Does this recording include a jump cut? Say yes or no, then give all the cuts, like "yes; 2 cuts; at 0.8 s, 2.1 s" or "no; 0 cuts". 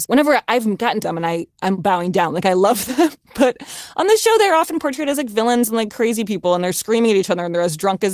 yes; 1 cut; at 1.0 s